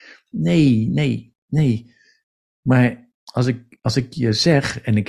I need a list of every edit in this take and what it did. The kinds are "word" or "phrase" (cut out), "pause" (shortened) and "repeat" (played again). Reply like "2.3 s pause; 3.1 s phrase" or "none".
3.1 s pause